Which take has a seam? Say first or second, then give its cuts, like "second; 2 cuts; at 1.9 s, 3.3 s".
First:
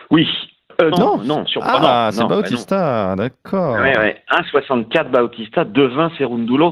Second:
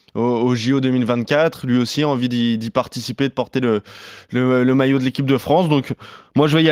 first; 1 cut; at 0.9 s